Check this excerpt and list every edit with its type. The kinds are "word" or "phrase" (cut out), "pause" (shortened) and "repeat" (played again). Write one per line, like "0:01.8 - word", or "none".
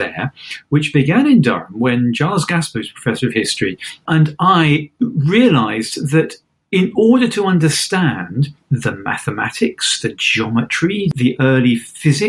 none

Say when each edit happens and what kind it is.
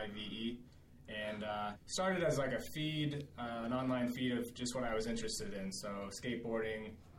0:01.8 - pause

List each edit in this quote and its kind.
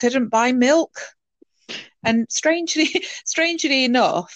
none

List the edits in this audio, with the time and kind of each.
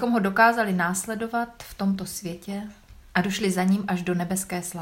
none

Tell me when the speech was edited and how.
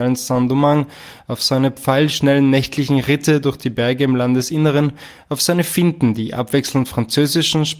none

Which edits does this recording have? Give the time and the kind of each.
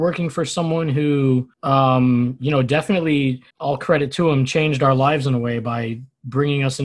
0:01.5 - pause
0:03.5 - pause

